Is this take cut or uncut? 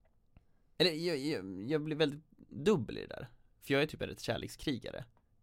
uncut